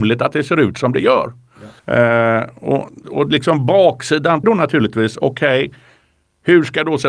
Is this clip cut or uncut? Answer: cut